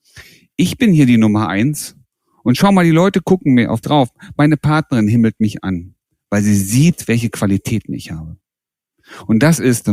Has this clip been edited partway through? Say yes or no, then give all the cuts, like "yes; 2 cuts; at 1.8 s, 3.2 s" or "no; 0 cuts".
yes; 1 cut; at 3.8 s